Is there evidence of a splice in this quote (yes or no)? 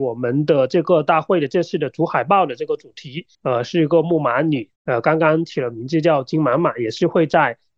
yes